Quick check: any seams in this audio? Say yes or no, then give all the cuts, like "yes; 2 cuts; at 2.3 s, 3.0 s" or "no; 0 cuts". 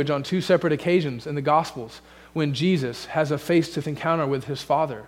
yes; 1 cut; at 3.8 s